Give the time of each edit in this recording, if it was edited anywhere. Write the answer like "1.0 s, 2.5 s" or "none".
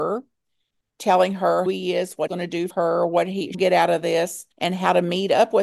1.7 s, 2.3 s, 2.7 s, 3.5 s, 4.5 s